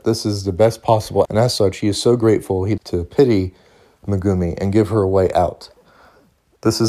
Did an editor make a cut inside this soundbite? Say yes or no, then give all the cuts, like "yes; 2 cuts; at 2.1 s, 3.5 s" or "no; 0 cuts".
yes; 2 cuts; at 1.2 s, 2.8 s